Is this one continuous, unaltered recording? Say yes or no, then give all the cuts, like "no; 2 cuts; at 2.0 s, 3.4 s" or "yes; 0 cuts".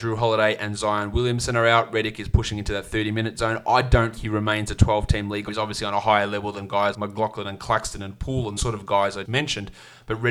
no; 5 cuts; at 4.2 s, 5.5 s, 6.9 s, 8.6 s, 9.2 s